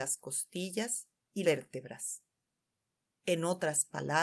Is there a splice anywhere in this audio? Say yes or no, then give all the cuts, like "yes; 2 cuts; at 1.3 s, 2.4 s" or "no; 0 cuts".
yes; 1 cut; at 1.4 s